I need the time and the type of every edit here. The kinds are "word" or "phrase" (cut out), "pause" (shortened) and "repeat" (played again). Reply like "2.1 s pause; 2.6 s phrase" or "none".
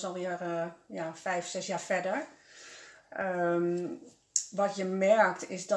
none

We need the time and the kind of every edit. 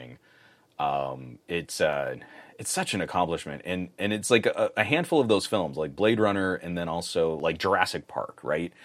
none

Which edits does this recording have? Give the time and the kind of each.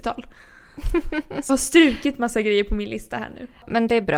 1.5 s word

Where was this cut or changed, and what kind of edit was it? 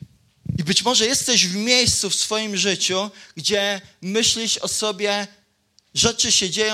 none

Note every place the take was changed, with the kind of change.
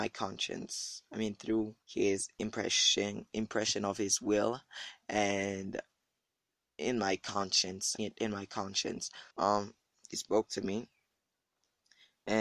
1.8 s pause; 8.0 s word; 9.3 s pause

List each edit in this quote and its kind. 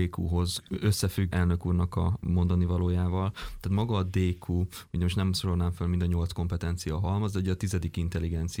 1.3 s word

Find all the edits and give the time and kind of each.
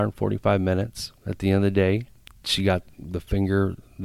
none

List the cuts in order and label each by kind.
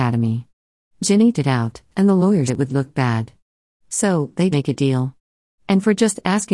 1.3 s word; 2.5 s word; 4.5 s word

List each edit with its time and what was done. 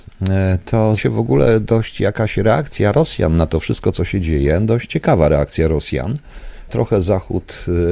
1.0 s word; 6.7 s word

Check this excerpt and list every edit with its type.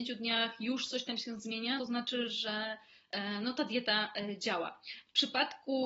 1.8 s word

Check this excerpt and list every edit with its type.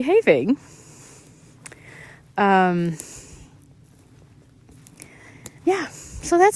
5.6 s pause

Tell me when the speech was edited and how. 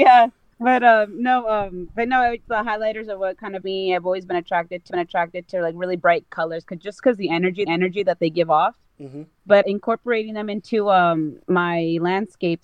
2.5 s word; 3.6 s word; 4.9 s repeat; 7.7 s repeat; 9.6 s word; 11.4 s pause

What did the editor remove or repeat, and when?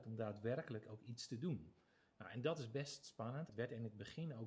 3.5 s word

